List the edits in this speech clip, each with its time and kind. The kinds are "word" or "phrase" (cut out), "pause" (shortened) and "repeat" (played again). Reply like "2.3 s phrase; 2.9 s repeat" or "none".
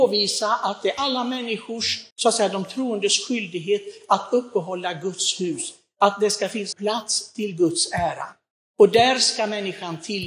2.1 s pause; 6.7 s word; 8.5 s pause